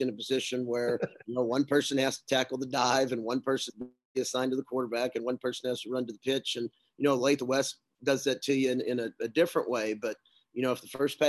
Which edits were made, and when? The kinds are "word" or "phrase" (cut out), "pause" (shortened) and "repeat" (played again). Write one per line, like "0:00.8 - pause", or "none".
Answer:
0:03.7 - word